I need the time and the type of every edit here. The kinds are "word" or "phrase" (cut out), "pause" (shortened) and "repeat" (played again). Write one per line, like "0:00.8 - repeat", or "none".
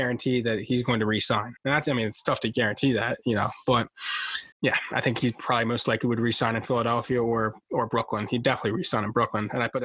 0:01.6 - pause
0:04.5 - pause